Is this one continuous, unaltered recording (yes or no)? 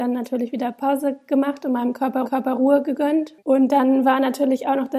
no